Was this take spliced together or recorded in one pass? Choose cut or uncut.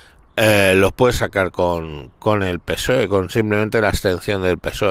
uncut